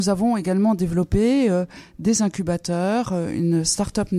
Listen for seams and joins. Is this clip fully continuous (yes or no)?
yes